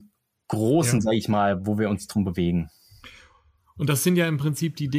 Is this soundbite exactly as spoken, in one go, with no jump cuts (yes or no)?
yes